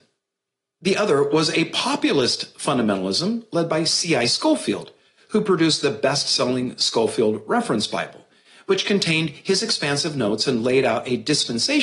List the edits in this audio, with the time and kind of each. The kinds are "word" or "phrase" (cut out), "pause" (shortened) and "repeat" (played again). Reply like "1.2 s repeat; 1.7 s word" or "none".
none